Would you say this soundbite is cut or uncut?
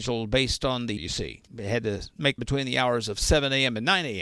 cut